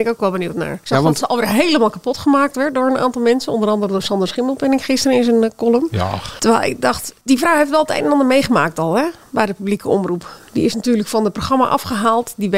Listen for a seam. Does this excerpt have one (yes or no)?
no